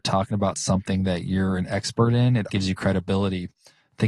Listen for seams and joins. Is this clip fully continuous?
no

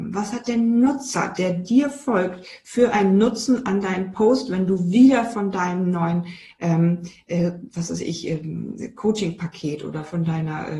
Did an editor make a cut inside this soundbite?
no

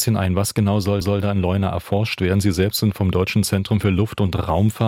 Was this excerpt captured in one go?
no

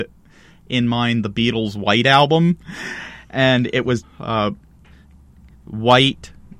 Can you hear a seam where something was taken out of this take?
yes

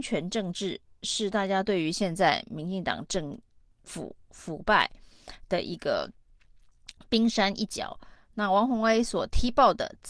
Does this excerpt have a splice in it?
no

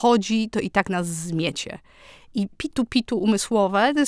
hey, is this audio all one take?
no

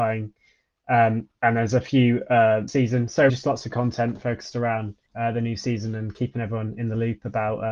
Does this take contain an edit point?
yes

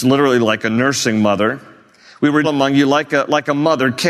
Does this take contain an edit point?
yes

